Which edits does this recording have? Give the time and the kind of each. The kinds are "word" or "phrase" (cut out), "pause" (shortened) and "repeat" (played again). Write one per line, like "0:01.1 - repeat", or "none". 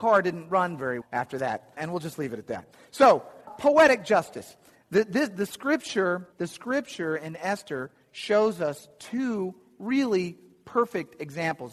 0:01.0 - word
0:01.8 - word
0:03.5 - word
0:06.3 - pause